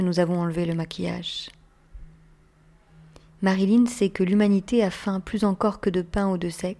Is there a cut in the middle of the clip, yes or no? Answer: no